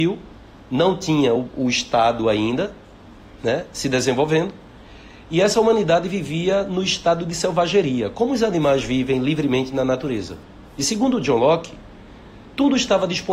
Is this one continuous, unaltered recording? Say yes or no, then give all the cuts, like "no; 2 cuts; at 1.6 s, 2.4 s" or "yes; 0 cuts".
yes; 0 cuts